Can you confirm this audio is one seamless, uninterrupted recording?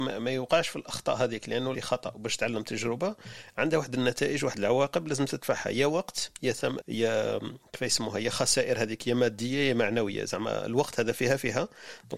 no; 2 cuts; at 1.7 s, 6.8 s

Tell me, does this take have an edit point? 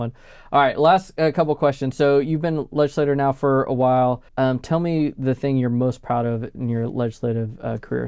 yes; 1 cut; at 4.3 s

